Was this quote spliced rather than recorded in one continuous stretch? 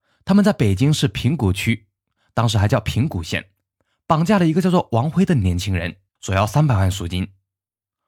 yes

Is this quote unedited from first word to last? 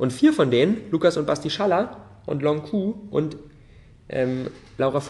yes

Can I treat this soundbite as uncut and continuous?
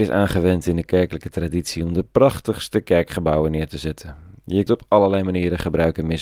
no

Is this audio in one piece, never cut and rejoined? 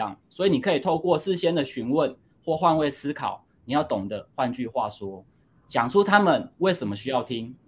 yes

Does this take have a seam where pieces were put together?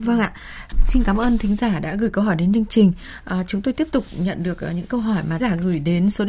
yes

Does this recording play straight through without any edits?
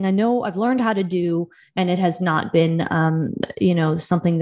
yes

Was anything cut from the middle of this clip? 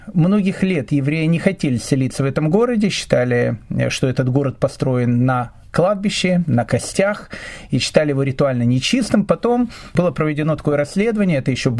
no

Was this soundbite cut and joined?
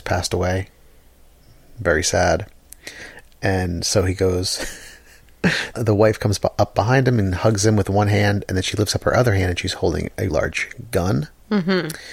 yes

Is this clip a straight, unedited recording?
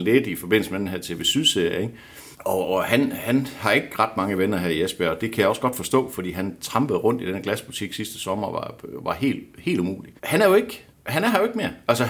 no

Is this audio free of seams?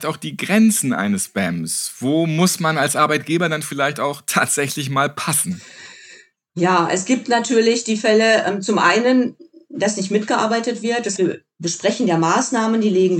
no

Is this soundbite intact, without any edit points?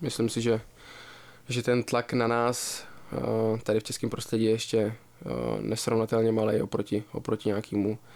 yes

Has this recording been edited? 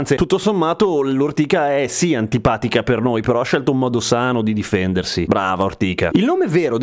no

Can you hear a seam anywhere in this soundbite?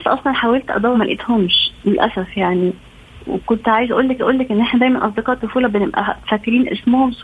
yes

